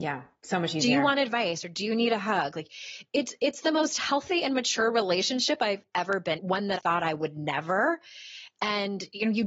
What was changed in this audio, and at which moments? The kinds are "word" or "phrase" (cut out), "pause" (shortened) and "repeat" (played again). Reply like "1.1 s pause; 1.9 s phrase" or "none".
6.4 s word; 6.8 s word